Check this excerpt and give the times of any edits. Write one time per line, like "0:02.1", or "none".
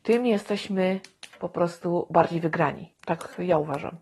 none